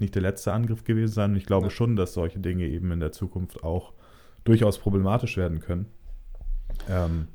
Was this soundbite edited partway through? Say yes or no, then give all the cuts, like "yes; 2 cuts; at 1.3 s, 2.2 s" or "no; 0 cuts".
no; 0 cuts